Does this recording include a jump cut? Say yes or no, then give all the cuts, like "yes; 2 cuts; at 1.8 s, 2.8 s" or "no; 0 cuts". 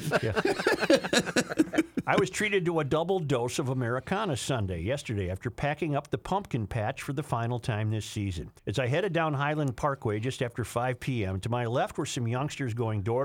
yes; 1 cut; at 8.6 s